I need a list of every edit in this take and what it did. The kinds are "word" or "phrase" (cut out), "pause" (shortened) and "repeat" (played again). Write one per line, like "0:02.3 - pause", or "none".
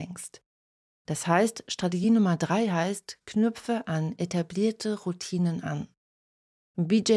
none